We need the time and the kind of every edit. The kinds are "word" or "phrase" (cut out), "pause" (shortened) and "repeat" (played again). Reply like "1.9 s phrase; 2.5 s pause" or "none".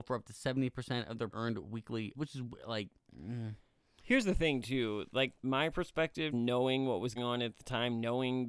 1.3 s word; 2.1 s word; 5.4 s word; 6.3 s word; 7.2 s word

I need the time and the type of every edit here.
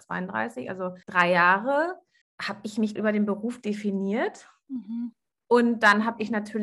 1.0 s pause; 2.2 s pause; 3.0 s word

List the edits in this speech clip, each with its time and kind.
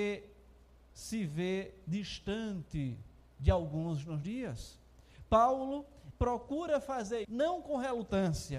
3.2 s pause; 4.2 s word; 6.1 s word; 7.2 s word

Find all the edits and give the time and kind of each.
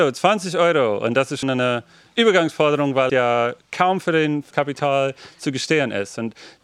1.4 s word; 3.1 s word; 4.5 s word

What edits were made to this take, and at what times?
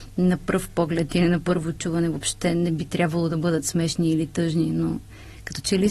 none

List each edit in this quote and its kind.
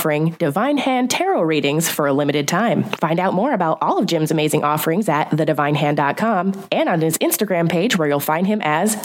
none

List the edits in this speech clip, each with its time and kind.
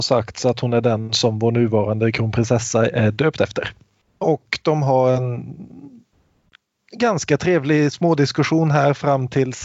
none

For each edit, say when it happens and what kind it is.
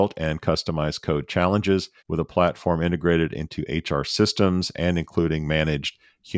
2.0 s pause

